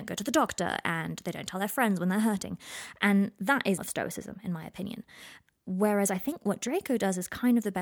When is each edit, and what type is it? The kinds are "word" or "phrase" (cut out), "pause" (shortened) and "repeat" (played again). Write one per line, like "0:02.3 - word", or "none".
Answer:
0:03.8 - phrase